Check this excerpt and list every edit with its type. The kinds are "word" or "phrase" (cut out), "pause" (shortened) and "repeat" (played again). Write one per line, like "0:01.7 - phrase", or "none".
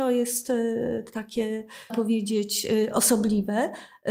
0:01.9 - word

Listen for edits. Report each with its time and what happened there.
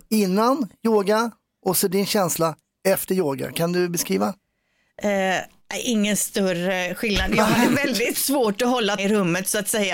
0:09.0 - word

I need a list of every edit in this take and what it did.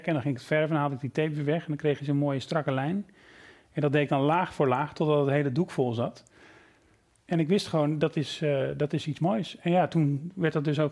none

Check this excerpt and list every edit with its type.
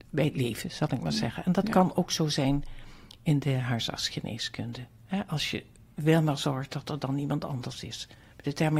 none

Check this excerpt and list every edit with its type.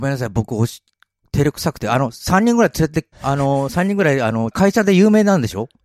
0:03.1 - pause
0:04.5 - phrase

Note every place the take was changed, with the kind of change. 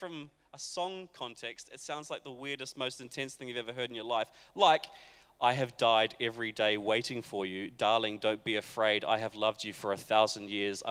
none

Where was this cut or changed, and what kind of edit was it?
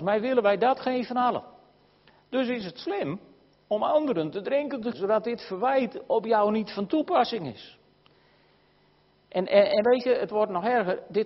0:04.9 - word

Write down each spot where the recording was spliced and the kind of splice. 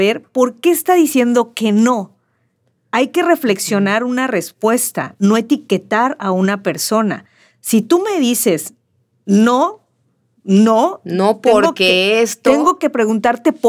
none

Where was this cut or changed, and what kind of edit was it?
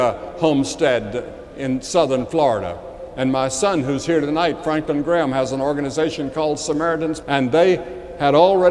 0:07.2 - word

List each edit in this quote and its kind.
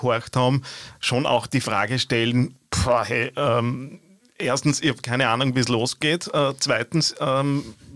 none

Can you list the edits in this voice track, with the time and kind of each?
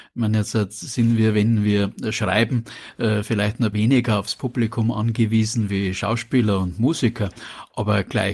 0:03.7 - word

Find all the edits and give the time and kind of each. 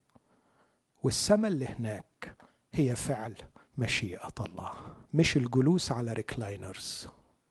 0:05.1 - pause

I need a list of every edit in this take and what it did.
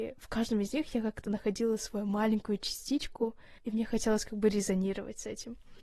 0:03.6 - pause

